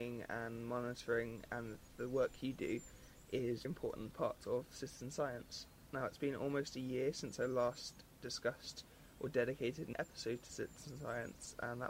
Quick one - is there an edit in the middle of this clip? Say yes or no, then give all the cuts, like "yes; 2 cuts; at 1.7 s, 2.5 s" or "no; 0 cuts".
yes; 2 cuts; at 3.6 s, 9.9 s